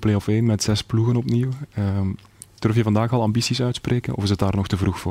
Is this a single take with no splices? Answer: yes; 0 cuts

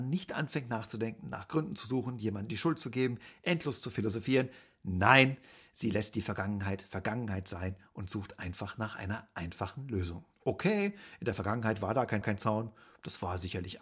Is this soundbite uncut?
no; 2 cuts; at 10.3 s, 12.2 s

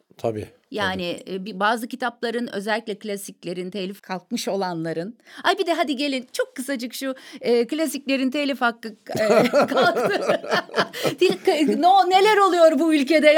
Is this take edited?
yes; 1 cut; at 4.0 s

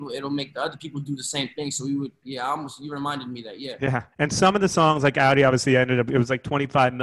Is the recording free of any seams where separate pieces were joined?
no; 2 cuts; at 2.2 s, 4.1 s

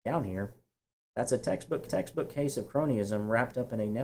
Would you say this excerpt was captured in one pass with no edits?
no; 1 cut; at 1.9 s

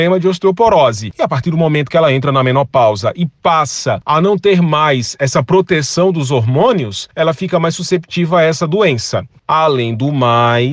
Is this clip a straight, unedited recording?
yes; 0 cuts

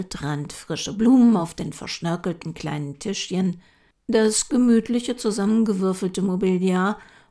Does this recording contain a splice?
no; 0 cuts

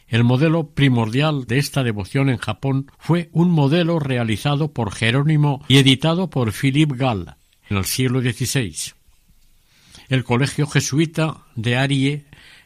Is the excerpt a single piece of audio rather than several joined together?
no; 4 cuts; at 1.5 s, 2.9 s, 5.7 s, 7.7 s

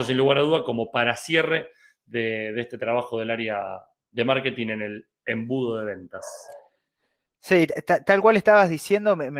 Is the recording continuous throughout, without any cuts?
yes; 0 cuts

